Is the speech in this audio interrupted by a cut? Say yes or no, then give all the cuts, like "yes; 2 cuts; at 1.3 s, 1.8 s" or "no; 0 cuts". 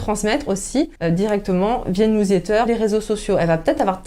yes; 2 cuts; at 1.0 s, 2.7 s